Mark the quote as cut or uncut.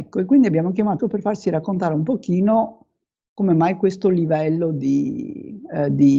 cut